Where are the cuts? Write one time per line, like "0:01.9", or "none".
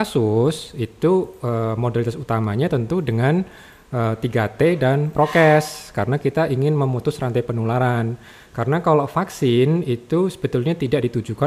none